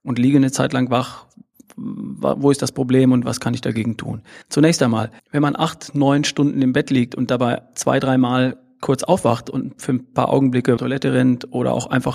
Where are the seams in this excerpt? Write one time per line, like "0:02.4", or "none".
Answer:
0:04.4
0:05.2
0:10.8